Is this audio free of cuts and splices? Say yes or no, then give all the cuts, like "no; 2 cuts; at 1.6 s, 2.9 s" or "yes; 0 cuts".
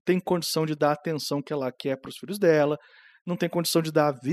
yes; 0 cuts